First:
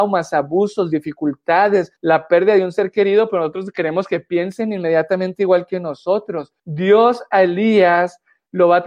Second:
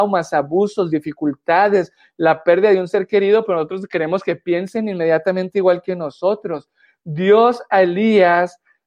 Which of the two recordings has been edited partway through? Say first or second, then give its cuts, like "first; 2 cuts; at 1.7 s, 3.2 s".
first; 2 cuts; at 2.0 s, 6.6 s